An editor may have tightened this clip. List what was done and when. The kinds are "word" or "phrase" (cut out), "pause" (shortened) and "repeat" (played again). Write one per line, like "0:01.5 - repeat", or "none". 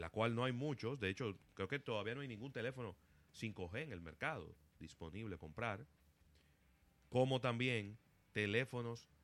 0:05.4 - word

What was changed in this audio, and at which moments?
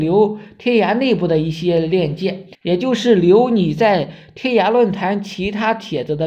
0:02.5 - pause

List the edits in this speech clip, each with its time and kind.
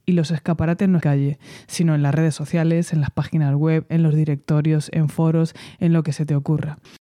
0:01.0 - phrase

